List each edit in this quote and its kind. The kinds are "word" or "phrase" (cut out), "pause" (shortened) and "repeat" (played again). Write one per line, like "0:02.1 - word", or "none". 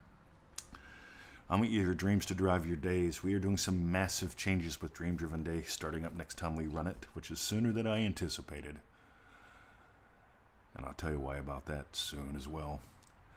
none

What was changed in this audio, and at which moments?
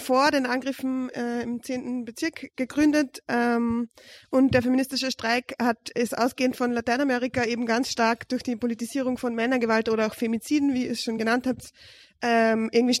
none

